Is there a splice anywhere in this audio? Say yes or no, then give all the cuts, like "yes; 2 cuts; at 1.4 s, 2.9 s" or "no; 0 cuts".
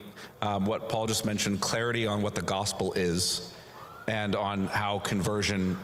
no; 0 cuts